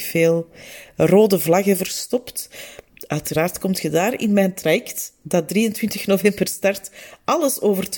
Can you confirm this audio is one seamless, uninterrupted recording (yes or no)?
yes